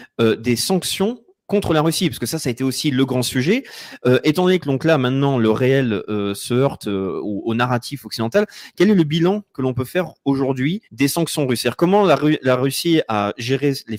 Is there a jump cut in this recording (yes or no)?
yes